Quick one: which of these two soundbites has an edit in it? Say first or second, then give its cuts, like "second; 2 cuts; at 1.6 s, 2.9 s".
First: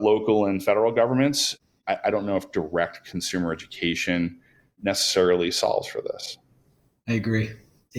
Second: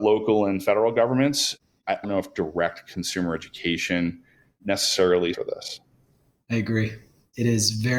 second; 2 cuts; at 2.0 s, 5.3 s